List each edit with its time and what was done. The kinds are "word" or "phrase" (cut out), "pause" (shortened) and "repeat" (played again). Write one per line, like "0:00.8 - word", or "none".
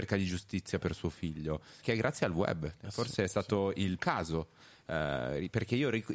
0:01.8 - word
0:02.8 - pause
0:04.0 - word